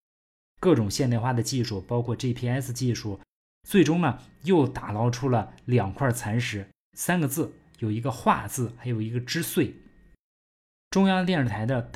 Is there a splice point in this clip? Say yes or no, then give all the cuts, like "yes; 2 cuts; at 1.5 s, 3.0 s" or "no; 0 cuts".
no; 0 cuts